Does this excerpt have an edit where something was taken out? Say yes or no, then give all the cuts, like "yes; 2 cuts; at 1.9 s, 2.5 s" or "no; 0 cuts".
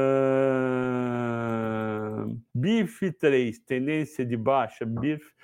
yes; 1 cut; at 2.5 s